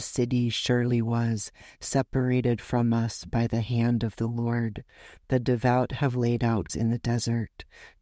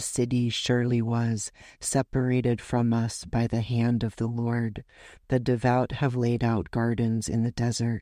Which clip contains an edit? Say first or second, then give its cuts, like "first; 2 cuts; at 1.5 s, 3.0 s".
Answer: first; 1 cut; at 6.7 s